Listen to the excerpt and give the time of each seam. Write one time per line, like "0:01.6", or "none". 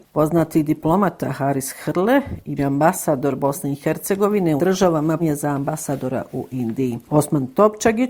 0:02.6
0:04.6
0:05.2

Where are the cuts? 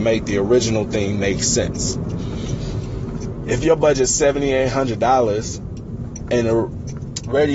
none

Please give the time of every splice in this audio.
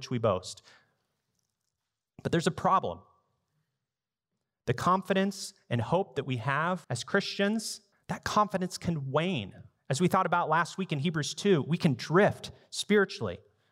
0:06.8
0:07.9
0:09.8

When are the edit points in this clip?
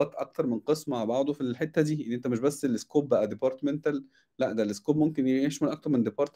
none

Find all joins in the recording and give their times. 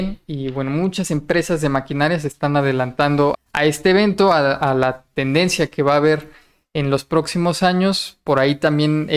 0:03.3

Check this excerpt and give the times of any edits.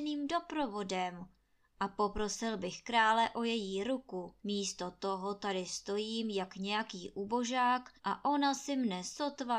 0:04.4
0:08.0

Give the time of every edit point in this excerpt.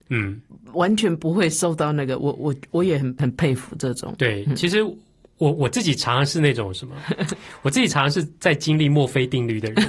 none

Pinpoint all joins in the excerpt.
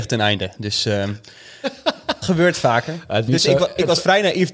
0:02.2
0:03.3

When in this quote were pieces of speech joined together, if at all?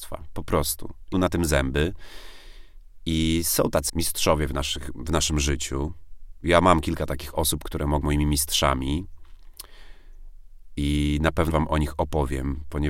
0:01.1
0:03.9
0:08.0
0:11.5

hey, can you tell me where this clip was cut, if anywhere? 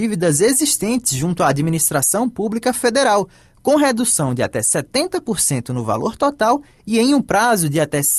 none

